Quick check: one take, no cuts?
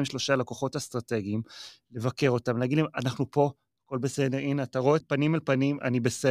no; 1 cut; at 5.0 s

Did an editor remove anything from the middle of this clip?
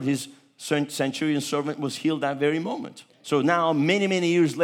yes; 1 cut; at 3.1 s

